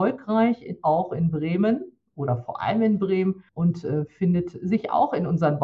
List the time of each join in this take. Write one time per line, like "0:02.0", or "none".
0:03.5